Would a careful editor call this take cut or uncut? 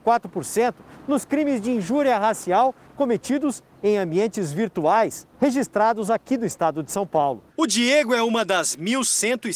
cut